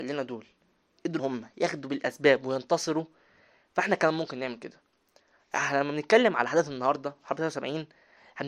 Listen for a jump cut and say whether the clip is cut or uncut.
cut